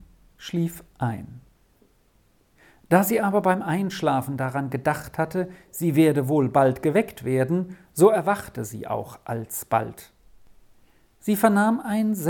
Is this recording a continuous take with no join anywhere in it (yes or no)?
yes